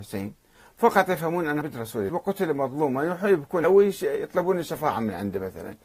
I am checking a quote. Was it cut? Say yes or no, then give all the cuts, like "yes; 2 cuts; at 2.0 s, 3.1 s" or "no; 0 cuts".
yes; 3 cuts; at 1.6 s, 2.1 s, 3.6 s